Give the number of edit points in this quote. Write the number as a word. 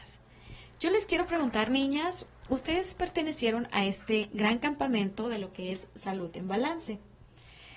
zero